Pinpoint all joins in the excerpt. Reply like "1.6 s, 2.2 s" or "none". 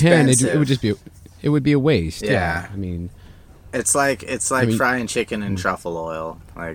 none